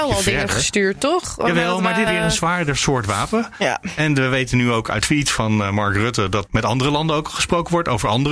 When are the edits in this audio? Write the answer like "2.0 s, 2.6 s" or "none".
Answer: 2.1 s, 5.0 s, 6.5 s

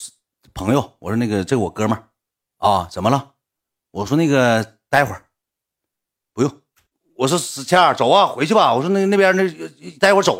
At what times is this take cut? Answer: none

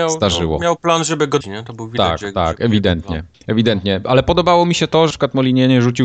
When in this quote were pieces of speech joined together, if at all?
1.4 s, 3.3 s, 5.1 s

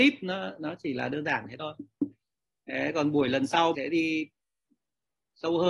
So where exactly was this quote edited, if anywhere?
3.7 s

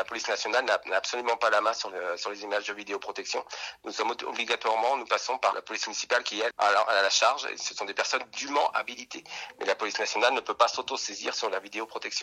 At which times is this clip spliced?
5.5 s, 6.5 s

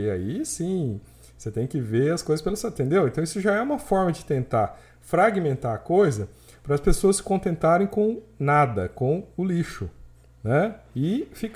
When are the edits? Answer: none

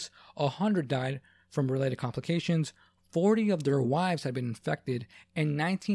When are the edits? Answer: none

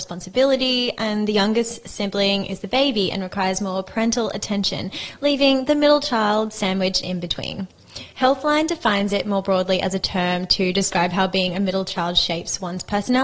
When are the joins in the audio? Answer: 8.1 s

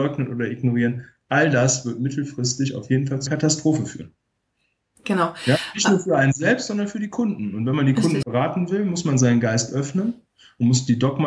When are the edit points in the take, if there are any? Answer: 3.3 s, 8.2 s

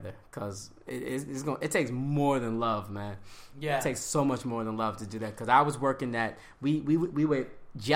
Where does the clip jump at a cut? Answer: none

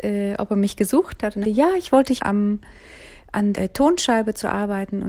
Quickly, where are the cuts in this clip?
1.4 s, 2.2 s, 3.5 s

